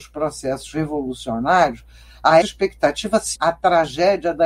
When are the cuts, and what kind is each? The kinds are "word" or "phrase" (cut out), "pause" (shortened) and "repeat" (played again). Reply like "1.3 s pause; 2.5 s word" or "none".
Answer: 2.4 s word; 3.3 s word

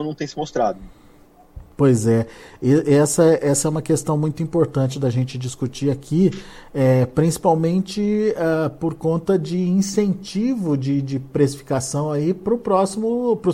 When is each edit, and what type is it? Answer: none

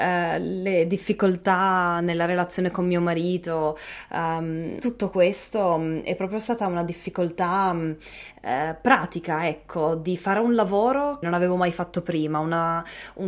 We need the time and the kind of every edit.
4.8 s phrase; 11.2 s word

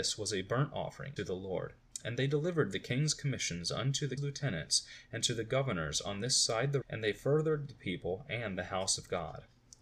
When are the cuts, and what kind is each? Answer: 1.2 s word; 4.2 s word; 6.8 s word

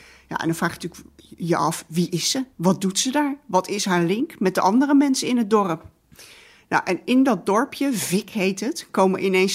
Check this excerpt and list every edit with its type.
2.5 s pause

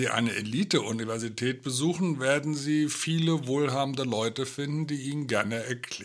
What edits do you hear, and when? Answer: none

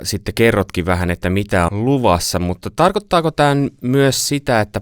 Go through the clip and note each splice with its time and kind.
1.7 s word

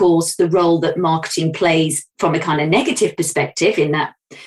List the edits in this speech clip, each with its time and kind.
none

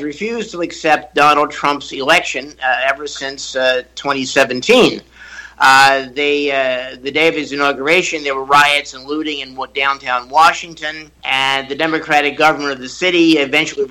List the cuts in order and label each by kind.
11.1 s pause

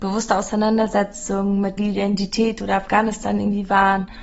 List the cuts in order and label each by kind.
1.8 s word

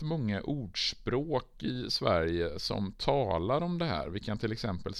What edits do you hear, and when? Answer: none

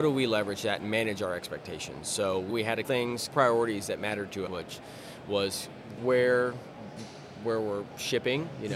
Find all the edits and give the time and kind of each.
2.5 s word; 2.8 s word; 3.3 s word; 4.5 s word; 6.0 s word

